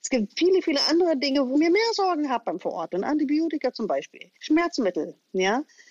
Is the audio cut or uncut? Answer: cut